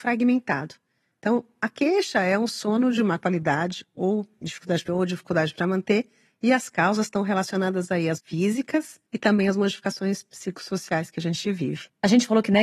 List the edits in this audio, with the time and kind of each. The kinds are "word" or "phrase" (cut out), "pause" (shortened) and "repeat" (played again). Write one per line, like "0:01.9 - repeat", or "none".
0:04.9 - word
0:08.2 - word
0:09.1 - pause